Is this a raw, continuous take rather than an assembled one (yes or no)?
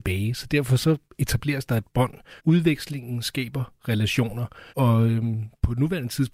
no